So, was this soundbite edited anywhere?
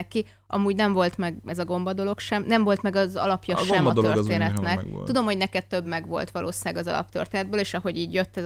no; 0 cuts

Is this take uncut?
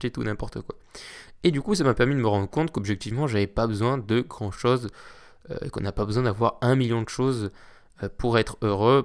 yes; 0 cuts

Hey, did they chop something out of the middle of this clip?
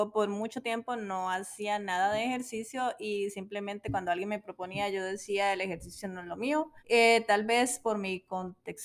yes; 1 cut; at 6.8 s

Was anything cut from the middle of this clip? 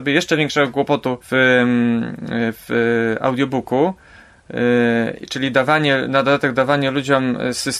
yes; 1 cut; at 1.2 s

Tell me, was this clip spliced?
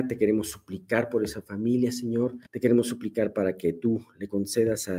yes; 1 cut; at 2.5 s

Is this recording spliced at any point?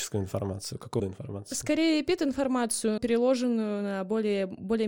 yes; 2 cuts; at 1.0 s, 3.0 s

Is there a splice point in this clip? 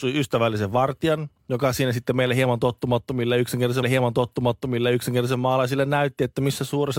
yes; 2 cuts; at 1.4 s, 3.8 s

